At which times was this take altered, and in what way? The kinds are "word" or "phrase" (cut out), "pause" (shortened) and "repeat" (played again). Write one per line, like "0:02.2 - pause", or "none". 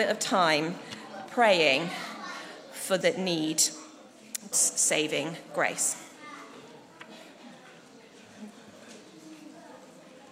0:03.0 - word
0:04.5 - word